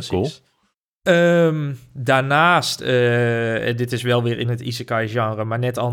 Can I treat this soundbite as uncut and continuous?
yes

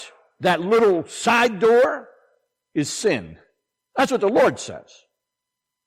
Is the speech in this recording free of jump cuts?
yes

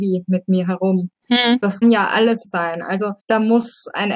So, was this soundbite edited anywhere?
yes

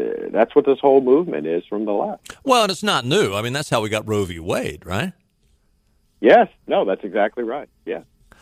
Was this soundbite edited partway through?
no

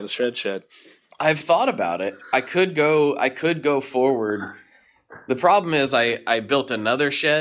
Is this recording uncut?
yes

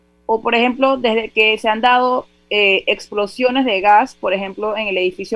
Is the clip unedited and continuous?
yes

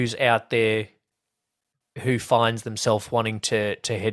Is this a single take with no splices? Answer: yes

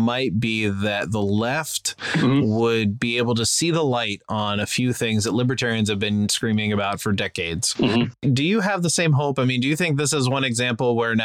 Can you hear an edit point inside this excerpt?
no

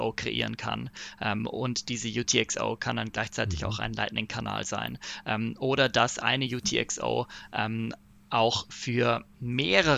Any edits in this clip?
no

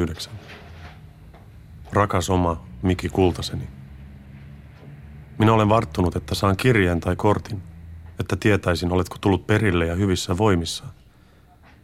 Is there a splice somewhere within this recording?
no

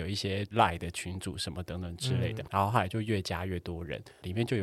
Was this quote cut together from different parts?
yes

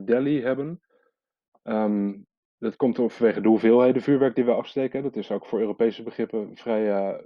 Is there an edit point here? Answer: no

